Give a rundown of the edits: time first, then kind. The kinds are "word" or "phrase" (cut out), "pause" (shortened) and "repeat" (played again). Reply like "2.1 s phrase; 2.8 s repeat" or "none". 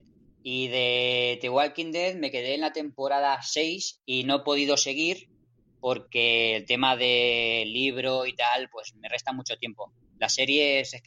none

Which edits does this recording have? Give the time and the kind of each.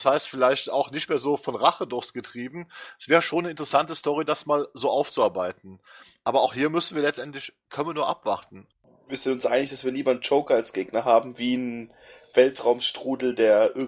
none

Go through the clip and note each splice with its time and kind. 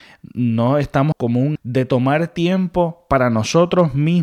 1.1 s word; 1.6 s word

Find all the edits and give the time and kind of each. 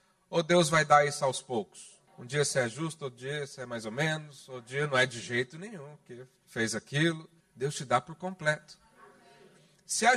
2.1 s pause; 7.4 s pause

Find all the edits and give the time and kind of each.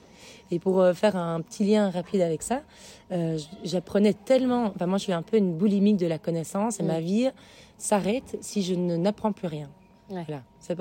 none

